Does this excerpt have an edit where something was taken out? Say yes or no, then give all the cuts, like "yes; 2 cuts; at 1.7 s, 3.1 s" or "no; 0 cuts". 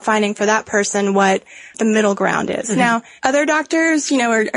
yes; 1 cut; at 1.7 s